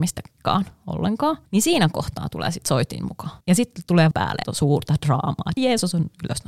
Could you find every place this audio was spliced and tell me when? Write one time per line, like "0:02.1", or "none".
0:01.5
0:03.4
0:04.1
0:04.4
0:05.6

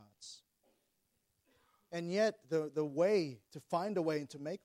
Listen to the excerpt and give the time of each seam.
0:02.4
0:03.5

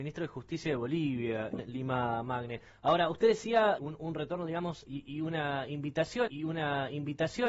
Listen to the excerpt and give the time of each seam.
0:01.6
0:03.8
0:04.9
0:06.3

